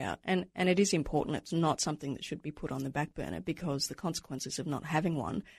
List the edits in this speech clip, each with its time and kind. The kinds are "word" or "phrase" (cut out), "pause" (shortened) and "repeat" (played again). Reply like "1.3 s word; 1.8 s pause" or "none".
none